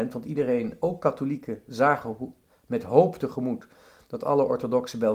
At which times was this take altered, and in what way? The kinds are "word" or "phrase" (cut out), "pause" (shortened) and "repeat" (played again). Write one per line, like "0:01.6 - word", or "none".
none